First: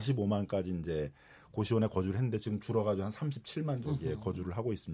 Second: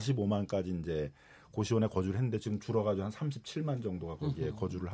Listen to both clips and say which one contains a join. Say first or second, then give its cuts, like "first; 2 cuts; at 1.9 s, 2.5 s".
first; 1 cut; at 3.8 s